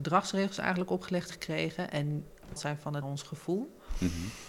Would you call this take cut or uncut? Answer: cut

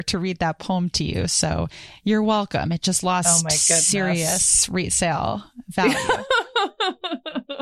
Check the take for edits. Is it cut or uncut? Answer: uncut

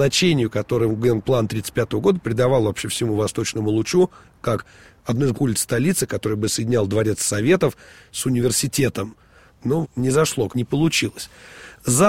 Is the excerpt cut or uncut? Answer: cut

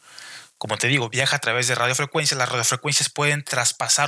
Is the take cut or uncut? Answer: uncut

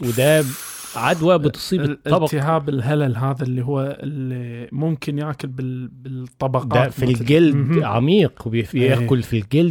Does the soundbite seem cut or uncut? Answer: uncut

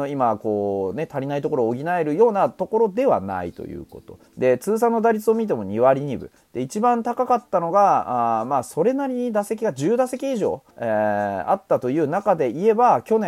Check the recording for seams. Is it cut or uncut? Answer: cut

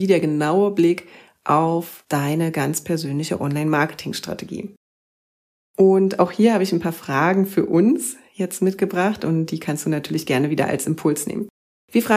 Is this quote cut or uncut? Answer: uncut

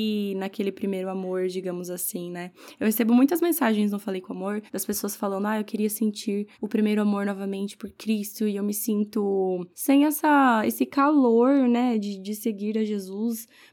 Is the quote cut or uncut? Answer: cut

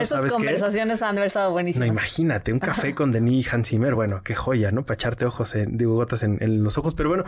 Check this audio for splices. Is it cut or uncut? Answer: uncut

